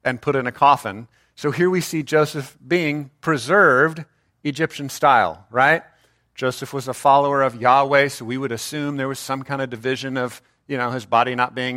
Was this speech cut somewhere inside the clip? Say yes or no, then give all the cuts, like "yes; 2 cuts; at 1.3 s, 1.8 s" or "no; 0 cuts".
no; 0 cuts